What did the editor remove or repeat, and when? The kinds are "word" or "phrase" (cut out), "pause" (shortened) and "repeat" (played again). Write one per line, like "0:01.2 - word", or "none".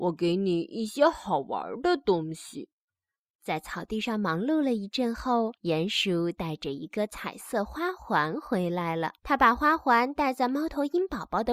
0:02.7 - pause
0:05.6 - pause
0:09.2 - pause